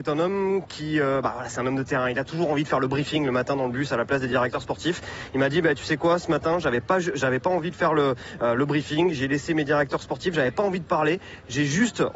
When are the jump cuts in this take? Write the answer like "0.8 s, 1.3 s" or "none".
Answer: none